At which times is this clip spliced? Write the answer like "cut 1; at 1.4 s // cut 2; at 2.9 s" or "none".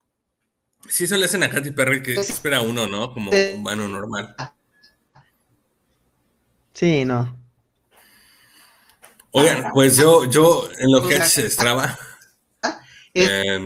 none

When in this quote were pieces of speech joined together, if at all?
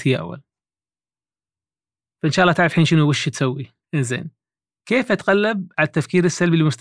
cut 1; at 3.8 s

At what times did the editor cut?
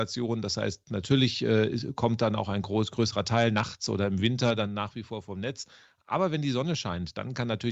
none

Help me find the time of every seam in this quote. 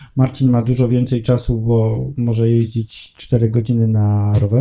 none

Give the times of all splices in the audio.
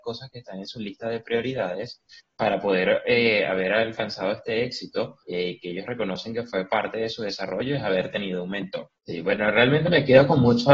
cut 1; at 5.2 s // cut 2; at 9.0 s

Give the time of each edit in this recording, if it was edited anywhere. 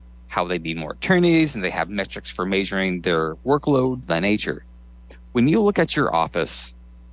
cut 1; at 4.0 s

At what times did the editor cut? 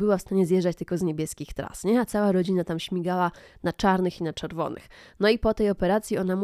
none

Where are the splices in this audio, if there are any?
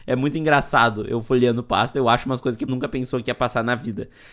cut 1; at 2.7 s

